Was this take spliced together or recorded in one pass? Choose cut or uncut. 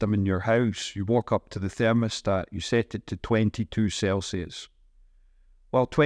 uncut